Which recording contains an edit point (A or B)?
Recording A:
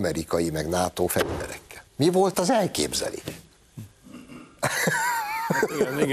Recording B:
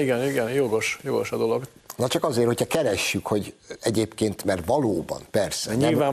A